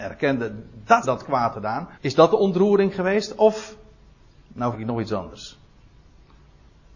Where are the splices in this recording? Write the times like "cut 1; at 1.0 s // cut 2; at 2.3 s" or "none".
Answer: cut 1; at 1.0 s // cut 2; at 1.5 s // cut 3; at 1.9 s // cut 4; at 4.7 s